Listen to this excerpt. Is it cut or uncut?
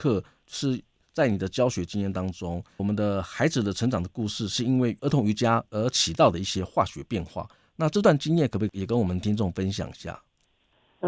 cut